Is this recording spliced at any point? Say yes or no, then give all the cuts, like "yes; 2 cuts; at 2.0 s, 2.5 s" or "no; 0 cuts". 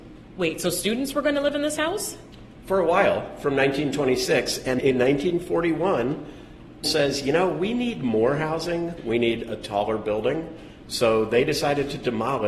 yes; 2 cuts; at 4.8 s, 6.8 s